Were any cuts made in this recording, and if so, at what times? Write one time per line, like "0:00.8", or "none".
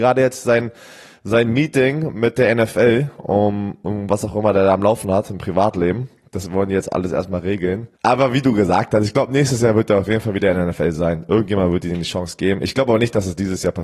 0:08.0